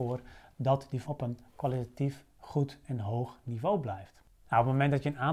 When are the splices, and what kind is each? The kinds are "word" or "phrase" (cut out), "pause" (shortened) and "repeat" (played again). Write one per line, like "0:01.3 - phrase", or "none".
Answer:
0:01.0 - word